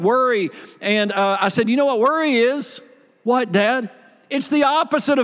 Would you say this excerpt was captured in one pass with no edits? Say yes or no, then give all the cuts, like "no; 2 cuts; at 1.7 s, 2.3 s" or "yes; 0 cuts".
yes; 0 cuts